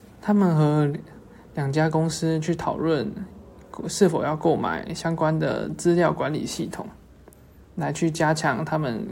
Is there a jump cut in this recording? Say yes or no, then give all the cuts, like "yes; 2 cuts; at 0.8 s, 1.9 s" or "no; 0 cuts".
no; 0 cuts